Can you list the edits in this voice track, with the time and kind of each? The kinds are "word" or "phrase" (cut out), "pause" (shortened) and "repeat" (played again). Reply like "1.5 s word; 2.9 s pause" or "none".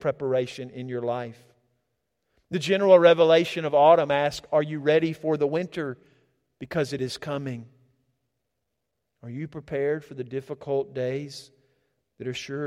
none